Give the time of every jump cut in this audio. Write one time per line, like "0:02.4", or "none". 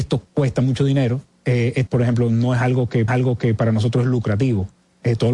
0:01.9
0:03.1